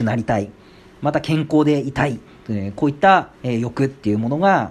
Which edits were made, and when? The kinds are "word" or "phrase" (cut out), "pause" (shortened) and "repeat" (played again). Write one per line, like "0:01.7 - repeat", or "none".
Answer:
0:03.4 - pause